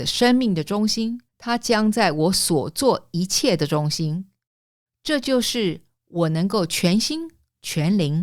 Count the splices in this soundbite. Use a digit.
1